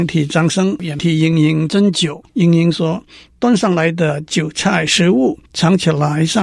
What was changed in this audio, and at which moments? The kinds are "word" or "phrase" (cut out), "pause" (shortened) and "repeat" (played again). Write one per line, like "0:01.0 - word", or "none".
0:02.3 - pause
0:05.5 - pause